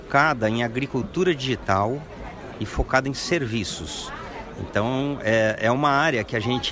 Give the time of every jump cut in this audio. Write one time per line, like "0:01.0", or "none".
none